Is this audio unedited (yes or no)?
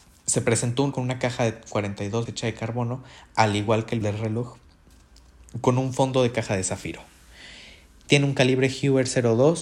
no